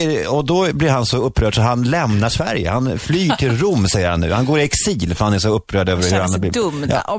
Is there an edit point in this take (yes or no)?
no